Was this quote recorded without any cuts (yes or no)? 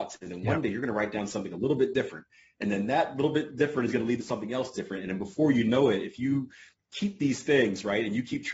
yes